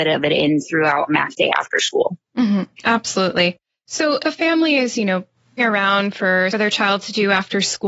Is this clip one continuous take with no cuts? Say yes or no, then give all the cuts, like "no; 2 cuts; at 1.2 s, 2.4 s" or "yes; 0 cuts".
no; 4 cuts; at 1.1 s, 4.2 s, 5.6 s, 6.5 s